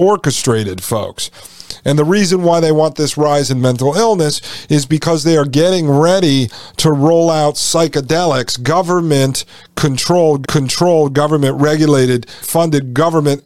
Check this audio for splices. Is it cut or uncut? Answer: cut